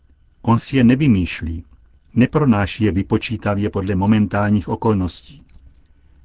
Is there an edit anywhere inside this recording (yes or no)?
no